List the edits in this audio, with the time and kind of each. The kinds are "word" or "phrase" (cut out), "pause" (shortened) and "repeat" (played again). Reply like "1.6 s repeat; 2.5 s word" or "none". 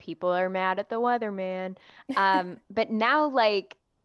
none